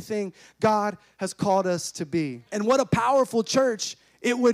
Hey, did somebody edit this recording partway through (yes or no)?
yes